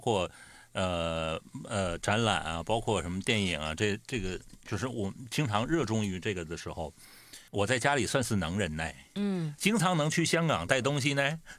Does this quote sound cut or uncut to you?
cut